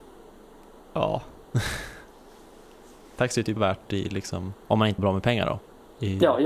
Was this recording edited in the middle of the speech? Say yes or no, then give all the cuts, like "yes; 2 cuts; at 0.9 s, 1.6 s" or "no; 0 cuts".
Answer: yes; 3 cuts; at 3.6 s, 4.6 s, 5.0 s